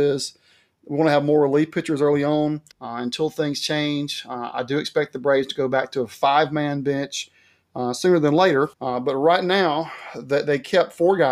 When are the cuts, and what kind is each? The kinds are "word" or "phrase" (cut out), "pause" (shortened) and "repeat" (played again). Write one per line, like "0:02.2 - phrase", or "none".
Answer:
0:02.7 - pause
0:08.7 - pause

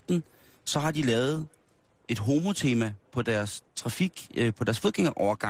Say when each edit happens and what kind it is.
none

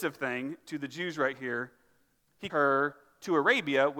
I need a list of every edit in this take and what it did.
0:02.5 - word

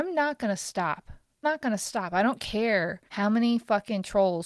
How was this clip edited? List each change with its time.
0:01.4 - word
0:03.1 - pause

